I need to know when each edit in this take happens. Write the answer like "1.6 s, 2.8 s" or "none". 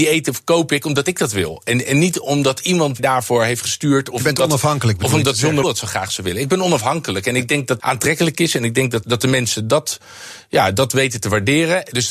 3.0 s, 5.6 s, 7.8 s, 9.0 s